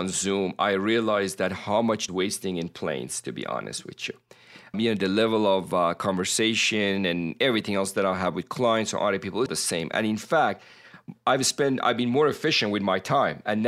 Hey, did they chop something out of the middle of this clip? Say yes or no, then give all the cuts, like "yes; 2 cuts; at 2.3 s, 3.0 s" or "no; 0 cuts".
yes; 3 cuts; at 2.1 s, 4.7 s, 9.5 s